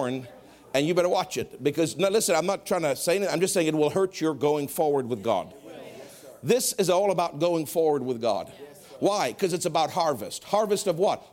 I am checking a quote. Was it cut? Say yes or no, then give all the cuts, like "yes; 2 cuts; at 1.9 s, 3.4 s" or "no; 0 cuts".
no; 0 cuts